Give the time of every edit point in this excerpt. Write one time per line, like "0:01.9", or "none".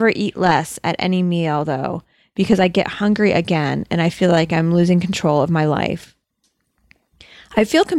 none